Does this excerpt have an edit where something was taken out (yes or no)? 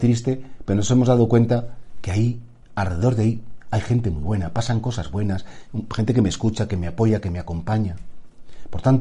no